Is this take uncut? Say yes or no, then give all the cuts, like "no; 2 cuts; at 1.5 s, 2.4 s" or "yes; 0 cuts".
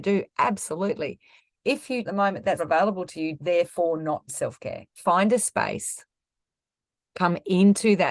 no; 5 cuts; at 2.0 s, 2.6 s, 3.4 s, 4.3 s, 4.9 s